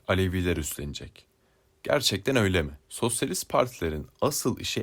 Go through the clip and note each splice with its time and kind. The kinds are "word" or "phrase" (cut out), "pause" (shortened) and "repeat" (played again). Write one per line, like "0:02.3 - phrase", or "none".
0:02.8 - pause